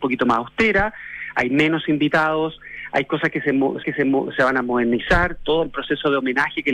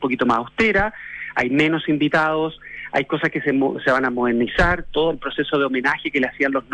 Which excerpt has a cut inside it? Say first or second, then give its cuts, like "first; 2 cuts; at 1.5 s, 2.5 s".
first; 1 cut; at 3.8 s